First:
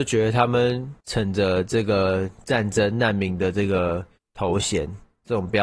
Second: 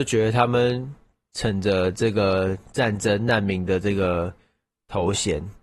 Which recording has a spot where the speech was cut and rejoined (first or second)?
first